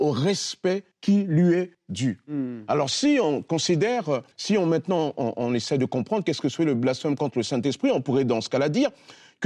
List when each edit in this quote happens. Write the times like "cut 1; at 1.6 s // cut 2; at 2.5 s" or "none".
cut 1; at 0.9 s // cut 2; at 1.7 s // cut 3; at 4.3 s